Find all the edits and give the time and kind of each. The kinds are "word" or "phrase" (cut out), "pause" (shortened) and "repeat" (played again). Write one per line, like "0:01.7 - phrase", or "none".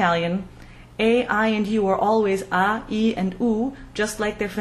none

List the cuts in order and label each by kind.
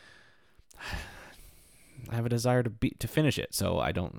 0:02.1 - word

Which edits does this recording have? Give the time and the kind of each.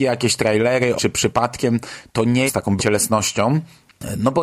0:01.0 - word
0:02.5 - phrase
0:02.8 - word

